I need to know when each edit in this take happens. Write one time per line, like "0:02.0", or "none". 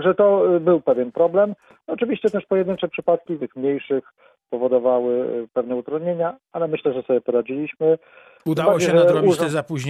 0:03.4

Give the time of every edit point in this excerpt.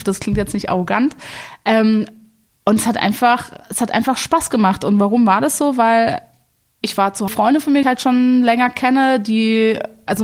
0:07.3
0:07.8

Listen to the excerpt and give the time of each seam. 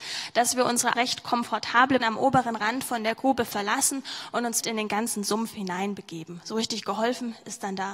0:00.9
0:02.0
0:04.6

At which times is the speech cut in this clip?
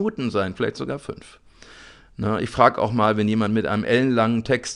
none

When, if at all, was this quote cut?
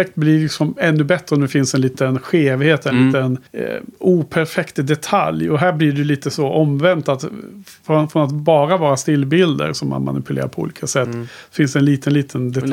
0:03.5

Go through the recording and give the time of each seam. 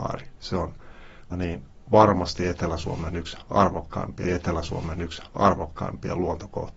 0:01.3
0:04.2

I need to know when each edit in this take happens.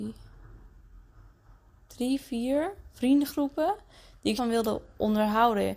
0:04.4

